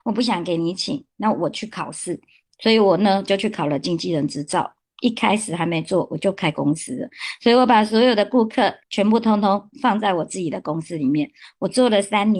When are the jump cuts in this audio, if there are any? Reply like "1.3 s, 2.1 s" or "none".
8.8 s